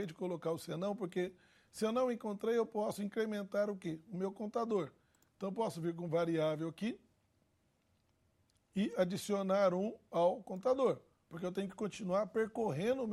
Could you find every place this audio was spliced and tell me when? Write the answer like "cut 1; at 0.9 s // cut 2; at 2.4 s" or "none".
none

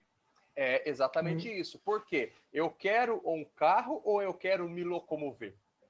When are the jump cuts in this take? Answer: none

